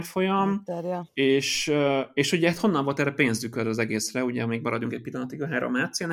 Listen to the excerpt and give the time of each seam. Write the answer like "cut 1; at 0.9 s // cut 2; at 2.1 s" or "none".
cut 1; at 1.1 s